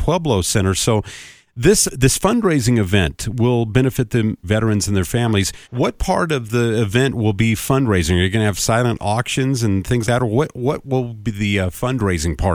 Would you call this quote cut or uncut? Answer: cut